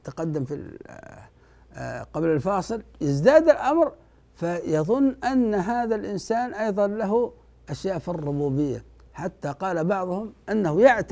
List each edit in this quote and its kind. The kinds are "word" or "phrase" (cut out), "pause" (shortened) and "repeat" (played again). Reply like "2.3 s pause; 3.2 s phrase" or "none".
none